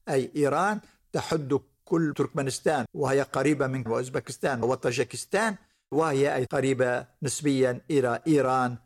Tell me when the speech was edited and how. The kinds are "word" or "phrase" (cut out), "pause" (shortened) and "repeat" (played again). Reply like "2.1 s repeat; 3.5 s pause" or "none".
2.1 s word; 2.9 s word; 3.9 s word; 4.6 s word; 6.5 s word